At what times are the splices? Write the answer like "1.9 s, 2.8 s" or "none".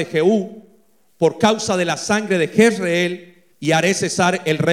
3.5 s